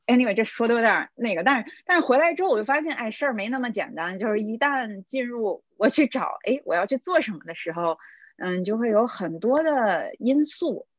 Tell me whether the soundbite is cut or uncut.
uncut